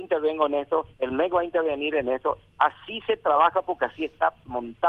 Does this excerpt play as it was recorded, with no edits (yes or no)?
no